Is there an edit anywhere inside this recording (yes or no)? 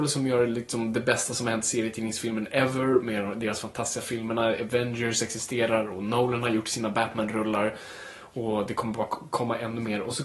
no